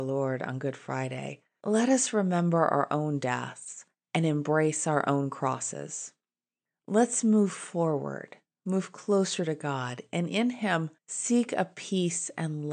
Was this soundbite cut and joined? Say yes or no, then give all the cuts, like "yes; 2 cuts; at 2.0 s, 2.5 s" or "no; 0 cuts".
no; 0 cuts